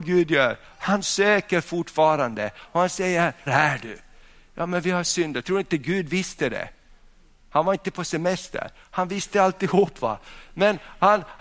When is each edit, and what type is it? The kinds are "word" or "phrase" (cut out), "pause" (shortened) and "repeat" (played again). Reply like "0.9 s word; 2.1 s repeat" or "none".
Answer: 3.5 s word